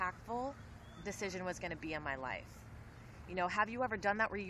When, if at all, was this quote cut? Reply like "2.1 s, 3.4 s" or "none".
1.0 s